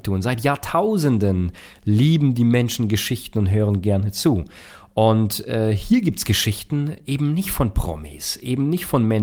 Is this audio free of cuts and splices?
yes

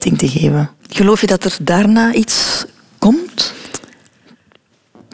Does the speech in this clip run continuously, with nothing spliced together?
yes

